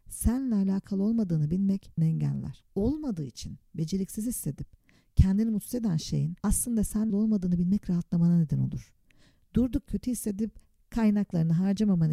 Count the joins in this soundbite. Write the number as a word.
five